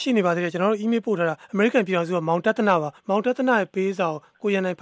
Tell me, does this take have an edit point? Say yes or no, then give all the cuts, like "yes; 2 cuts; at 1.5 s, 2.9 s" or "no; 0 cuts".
yes; 2 cuts; at 1.4 s, 3.0 s